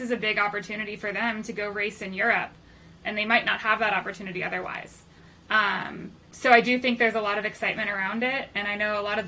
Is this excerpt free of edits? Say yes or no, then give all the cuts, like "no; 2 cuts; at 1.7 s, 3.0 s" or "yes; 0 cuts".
yes; 0 cuts